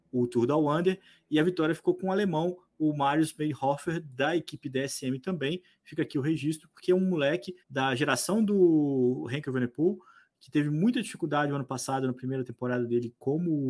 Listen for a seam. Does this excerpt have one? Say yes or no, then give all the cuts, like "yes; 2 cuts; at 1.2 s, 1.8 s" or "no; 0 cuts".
yes; 1 cut; at 7.6 s